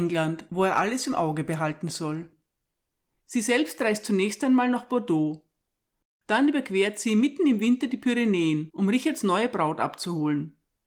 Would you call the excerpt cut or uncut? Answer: uncut